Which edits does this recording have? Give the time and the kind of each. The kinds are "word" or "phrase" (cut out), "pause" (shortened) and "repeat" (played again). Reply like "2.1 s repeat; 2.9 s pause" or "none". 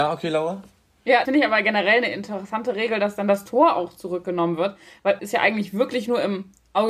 1.2 s word; 5.2 s word